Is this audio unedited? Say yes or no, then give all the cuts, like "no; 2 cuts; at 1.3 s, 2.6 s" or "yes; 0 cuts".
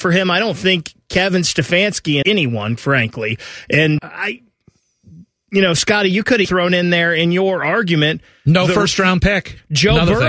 no; 4 cuts; at 2.2 s, 2.8 s, 4.0 s, 6.4 s